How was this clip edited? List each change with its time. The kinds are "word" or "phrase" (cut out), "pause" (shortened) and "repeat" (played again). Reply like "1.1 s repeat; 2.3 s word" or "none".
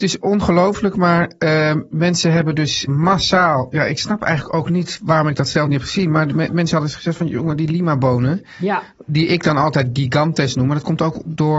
2.9 s word